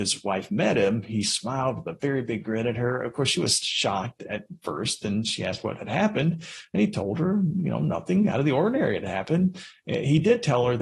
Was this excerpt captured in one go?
yes; 0 cuts

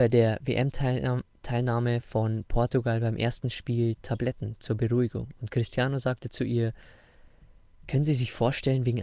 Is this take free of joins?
yes; 0 cuts

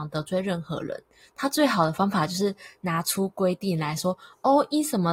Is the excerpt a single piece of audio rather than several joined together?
yes; 0 cuts

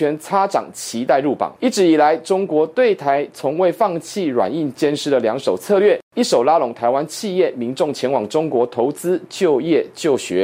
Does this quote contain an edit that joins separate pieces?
no; 0 cuts

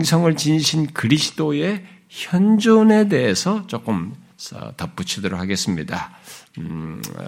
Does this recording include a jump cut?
no; 0 cuts

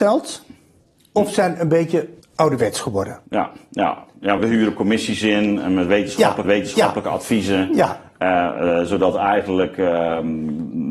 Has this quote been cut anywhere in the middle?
yes; 4 cuts; at 2.2 s, 3.3 s, 4.4 s, 6.4 s

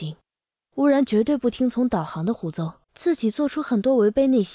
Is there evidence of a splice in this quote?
yes; 1 cut; at 2.8 s

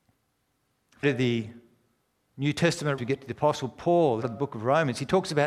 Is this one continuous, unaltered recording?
no; 3 cuts; at 1.0 s, 3.0 s, 4.2 s

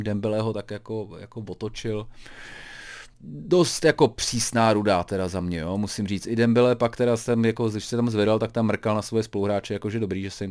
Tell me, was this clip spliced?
yes; 1 cut; at 3.1 s

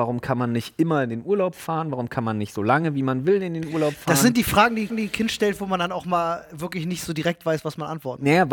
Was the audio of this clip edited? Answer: yes; 1 cut; at 4.9 s

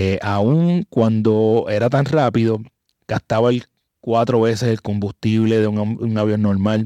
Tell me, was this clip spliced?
no; 0 cuts

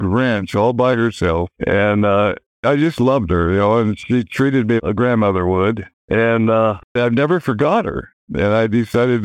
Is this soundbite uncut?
no; 2 cuts; at 1.6 s, 4.8 s

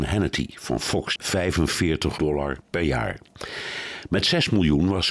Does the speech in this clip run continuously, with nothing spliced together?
no; 2 cuts; at 1.2 s, 2.2 s

